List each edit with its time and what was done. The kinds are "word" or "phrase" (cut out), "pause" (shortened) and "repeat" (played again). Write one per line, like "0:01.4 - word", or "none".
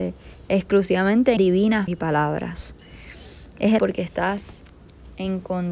0:01.4 - word
0:01.9 - word
0:03.8 - word